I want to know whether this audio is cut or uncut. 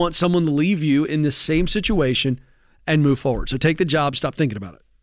uncut